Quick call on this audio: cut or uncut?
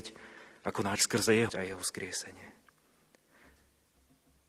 cut